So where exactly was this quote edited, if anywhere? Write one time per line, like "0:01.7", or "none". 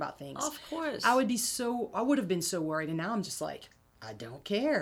none